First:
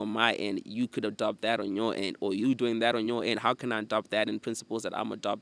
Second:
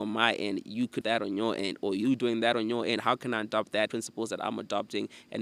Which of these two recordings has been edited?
second; 2 cuts; at 1.0 s, 3.9 s

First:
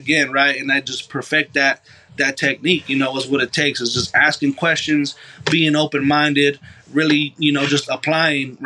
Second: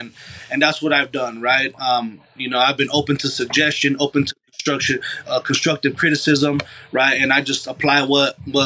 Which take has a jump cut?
second; 1 cut; at 5.2 s

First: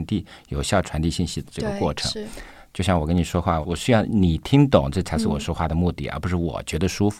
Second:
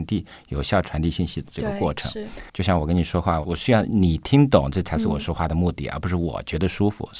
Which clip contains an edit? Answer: second; 1 cut; at 2.5 s

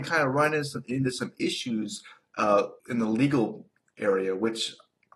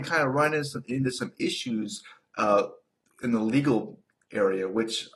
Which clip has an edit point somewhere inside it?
first; 1 cut; at 2.8 s

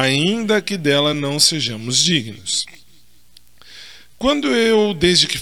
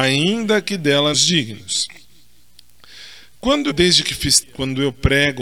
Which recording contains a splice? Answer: second; 3 cuts; at 1.1 s, 3.7 s, 4.4 s

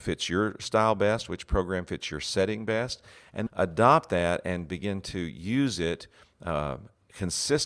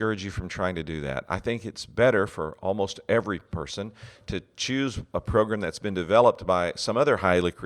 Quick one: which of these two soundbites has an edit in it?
first; 1 cut; at 3.5 s

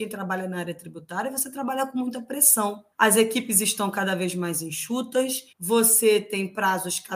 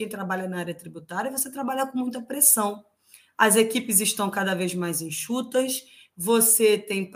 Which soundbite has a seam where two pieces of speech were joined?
first; 2 cuts; at 2.9 s, 5.5 s

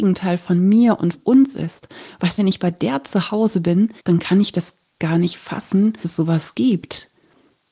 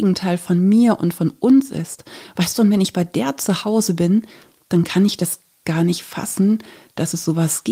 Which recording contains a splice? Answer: first; 4 cuts; at 1.1 s, 2.4 s, 4.0 s, 6.0 s

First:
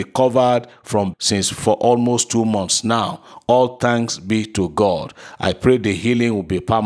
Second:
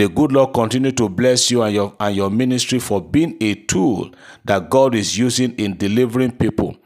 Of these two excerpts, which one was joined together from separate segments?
first; 1 cut; at 1.1 s

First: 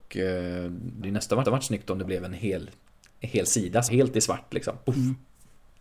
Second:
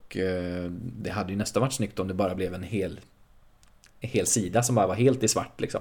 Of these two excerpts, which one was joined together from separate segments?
first; 5 cuts; at 1.0 s, 1.4 s, 2.0 s, 2.9 s, 3.9 s

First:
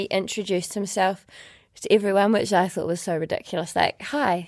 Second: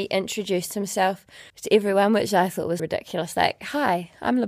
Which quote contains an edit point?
second; 2 cuts; at 1.5 s, 2.8 s

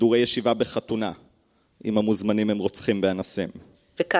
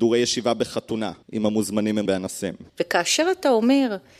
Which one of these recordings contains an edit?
second; 3 cuts; at 1.2 s, 2.1 s, 2.7 s

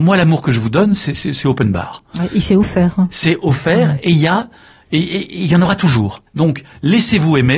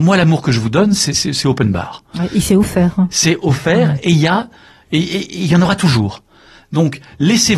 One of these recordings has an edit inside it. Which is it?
first; 1 cut; at 6.3 s

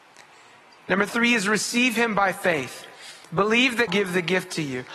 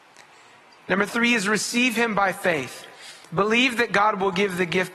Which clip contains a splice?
first; 1 cut; at 3.9 s

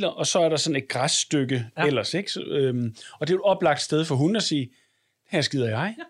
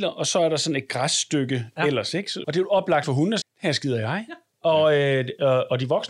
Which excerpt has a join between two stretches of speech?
second; 3 cuts; at 2.4 s, 3.0 s, 3.4 s

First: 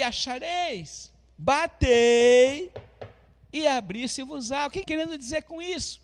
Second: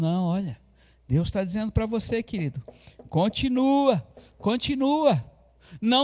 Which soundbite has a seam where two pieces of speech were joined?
first; 1 cut; at 4.8 s

